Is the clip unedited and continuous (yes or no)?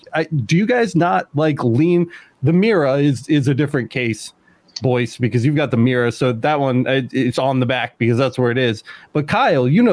no